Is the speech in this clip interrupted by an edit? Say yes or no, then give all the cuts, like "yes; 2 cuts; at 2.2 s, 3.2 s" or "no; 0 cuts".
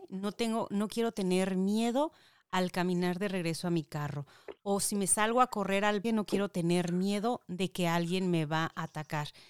yes; 1 cut; at 6.0 s